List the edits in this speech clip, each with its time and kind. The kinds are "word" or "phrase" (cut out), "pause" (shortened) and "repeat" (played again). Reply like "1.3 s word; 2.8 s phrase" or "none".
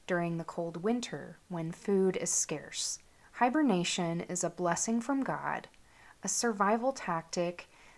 3.1 s pause